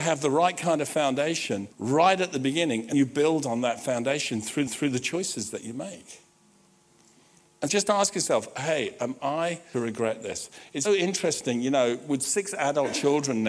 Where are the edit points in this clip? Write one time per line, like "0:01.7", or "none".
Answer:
0:01.7
0:02.9
0:04.7
0:07.7
0:09.7
0:10.8

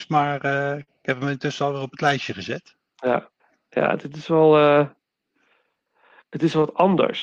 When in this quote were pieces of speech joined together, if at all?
0:03.4

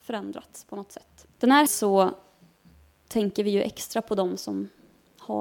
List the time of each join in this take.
0:01.3
0:01.7

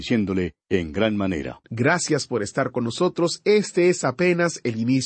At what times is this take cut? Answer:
0:01.6

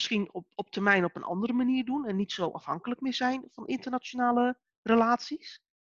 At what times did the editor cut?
none

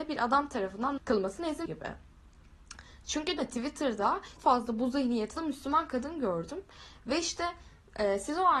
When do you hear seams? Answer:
0:01.0
0:01.7
0:03.4
0:04.4
0:05.4

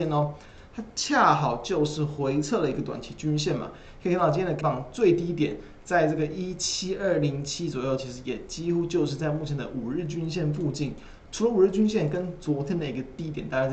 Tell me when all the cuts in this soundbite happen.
0:04.6

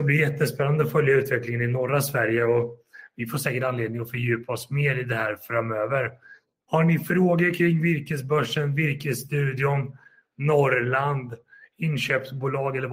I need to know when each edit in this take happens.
none

